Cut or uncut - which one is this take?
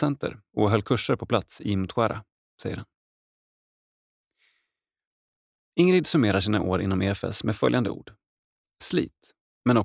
uncut